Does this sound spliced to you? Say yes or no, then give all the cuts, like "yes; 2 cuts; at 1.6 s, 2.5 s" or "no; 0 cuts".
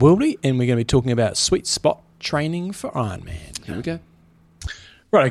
no; 0 cuts